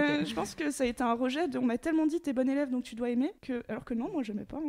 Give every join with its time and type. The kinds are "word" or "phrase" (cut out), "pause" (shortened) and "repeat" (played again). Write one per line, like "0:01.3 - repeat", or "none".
0:03.4 - pause